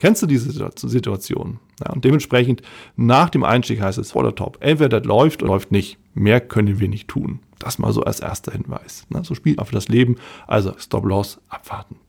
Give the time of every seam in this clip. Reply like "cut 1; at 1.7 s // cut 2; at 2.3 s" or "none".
cut 1; at 4.1 s // cut 2; at 5.5 s // cut 3; at 9.6 s // cut 4; at 10.8 s